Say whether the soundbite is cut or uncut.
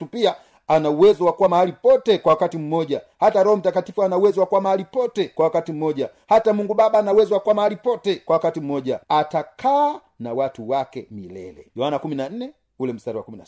cut